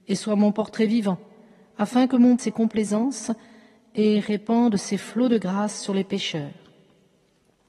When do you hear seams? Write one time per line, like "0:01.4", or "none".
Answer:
0:02.4